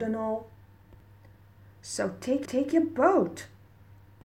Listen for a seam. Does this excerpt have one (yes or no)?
yes